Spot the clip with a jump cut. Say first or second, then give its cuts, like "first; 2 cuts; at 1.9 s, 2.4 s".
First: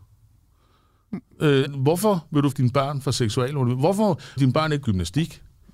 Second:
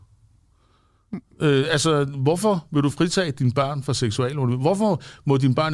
first; 4 cuts; at 1.6 s, 2.5 s, 4.4 s, 4.8 s